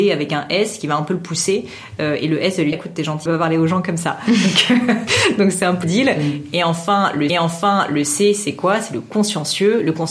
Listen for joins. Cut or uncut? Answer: cut